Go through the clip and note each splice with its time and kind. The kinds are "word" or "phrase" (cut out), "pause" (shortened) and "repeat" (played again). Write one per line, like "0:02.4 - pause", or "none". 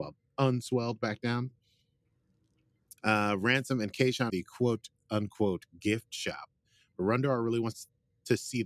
0:03.0 - pause
0:04.3 - phrase